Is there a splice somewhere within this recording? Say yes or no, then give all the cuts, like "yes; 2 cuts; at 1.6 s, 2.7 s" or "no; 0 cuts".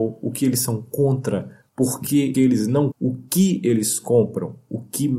yes; 3 cuts; at 1.7 s, 2.3 s, 2.9 s